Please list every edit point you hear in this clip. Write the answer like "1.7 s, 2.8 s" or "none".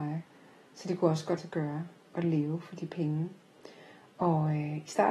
1.4 s